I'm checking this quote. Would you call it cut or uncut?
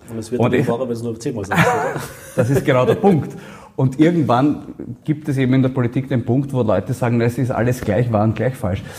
uncut